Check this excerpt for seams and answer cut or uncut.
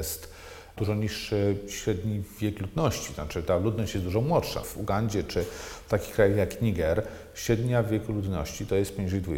cut